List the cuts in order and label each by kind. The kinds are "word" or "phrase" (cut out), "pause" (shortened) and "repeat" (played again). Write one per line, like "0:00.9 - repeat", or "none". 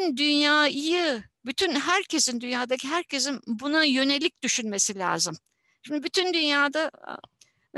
none